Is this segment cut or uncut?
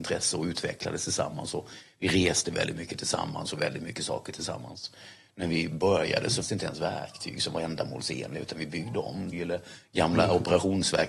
cut